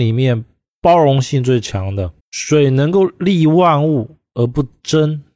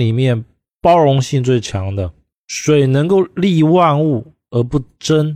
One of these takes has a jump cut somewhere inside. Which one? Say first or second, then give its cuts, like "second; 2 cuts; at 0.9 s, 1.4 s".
first; 1 cut; at 2.2 s